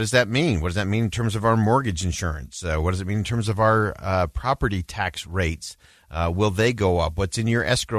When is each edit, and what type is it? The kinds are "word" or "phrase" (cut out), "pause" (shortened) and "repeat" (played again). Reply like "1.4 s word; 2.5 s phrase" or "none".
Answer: none